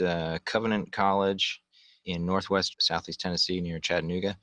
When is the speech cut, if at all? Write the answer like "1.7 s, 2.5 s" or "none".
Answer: 2.7 s